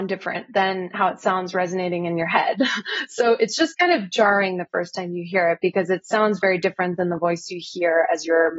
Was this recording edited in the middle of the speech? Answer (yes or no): no